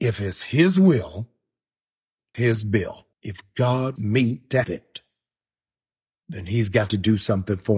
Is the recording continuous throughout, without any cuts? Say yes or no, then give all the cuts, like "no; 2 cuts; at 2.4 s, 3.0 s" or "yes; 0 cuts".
no; 4 cuts; at 2.3 s, 3.1 s, 4.0 s, 4.6 s